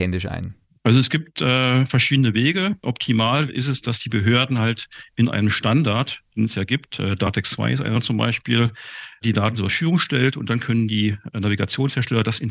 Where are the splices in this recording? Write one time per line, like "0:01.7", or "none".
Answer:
0:06.3